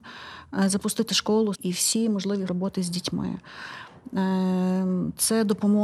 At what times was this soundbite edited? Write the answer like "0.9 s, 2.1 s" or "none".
1.5 s, 2.5 s